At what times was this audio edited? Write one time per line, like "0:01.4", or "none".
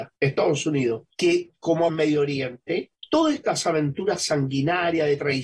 0:01.9